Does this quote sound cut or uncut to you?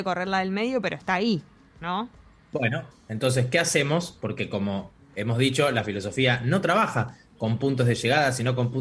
uncut